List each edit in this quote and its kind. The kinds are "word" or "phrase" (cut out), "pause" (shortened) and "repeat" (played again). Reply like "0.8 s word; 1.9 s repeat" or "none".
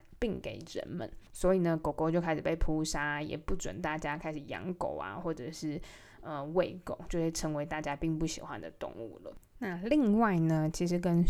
1.3 s pause